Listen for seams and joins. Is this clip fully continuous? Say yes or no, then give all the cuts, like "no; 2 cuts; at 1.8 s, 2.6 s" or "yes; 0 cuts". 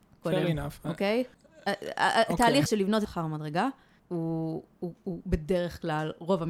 no; 4 cuts; at 1.3 s, 2.7 s, 3.0 s, 4.0 s